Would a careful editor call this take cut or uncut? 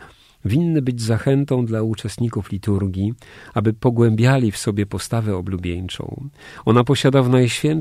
uncut